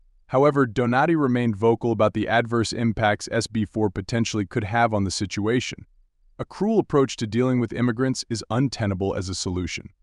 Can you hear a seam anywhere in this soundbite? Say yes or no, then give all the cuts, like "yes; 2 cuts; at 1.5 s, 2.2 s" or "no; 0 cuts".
no; 0 cuts